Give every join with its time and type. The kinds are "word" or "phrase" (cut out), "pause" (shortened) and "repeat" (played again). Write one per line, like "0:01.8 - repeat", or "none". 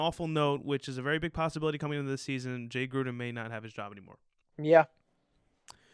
0:04.4 - pause